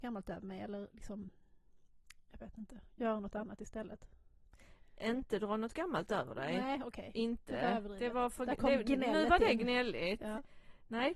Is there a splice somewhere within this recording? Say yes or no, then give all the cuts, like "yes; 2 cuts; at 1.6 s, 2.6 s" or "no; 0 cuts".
no; 0 cuts